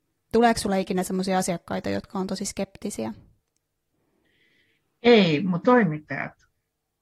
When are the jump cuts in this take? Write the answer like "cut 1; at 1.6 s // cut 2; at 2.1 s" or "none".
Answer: cut 1; at 5.6 s